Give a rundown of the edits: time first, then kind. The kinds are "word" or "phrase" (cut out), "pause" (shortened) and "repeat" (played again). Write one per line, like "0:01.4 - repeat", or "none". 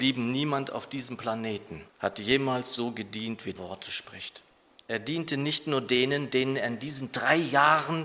0:01.9 - pause
0:03.6 - phrase
0:04.7 - pause